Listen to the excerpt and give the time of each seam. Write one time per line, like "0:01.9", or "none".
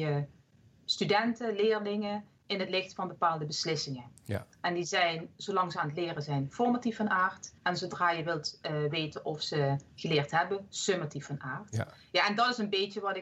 0:07.6